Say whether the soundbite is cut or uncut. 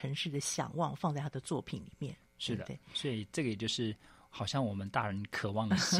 uncut